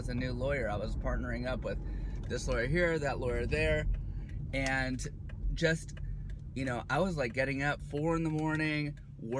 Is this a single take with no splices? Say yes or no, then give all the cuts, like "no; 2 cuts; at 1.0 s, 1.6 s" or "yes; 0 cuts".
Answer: yes; 0 cuts